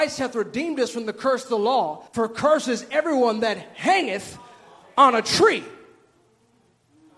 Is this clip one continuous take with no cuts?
no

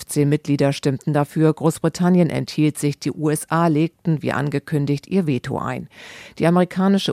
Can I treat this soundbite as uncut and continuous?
yes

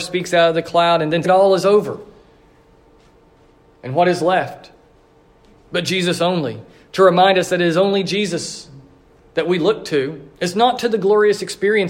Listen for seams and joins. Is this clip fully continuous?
no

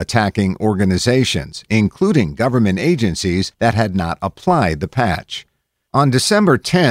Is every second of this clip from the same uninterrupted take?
yes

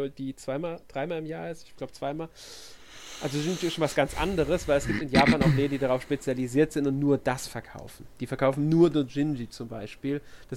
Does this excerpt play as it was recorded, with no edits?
yes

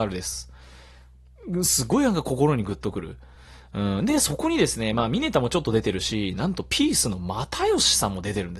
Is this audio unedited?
yes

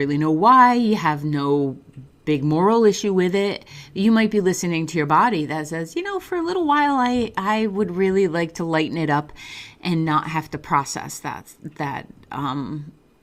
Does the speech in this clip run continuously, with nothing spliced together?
yes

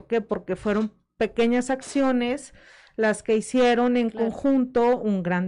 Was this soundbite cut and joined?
no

